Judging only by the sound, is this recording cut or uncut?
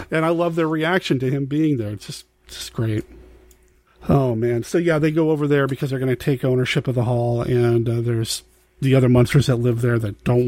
uncut